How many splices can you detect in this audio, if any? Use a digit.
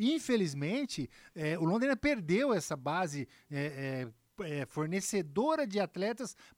0